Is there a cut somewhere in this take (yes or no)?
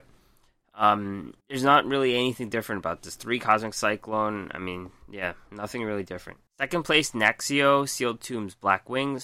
yes